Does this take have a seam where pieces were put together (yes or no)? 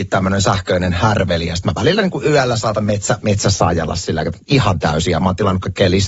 no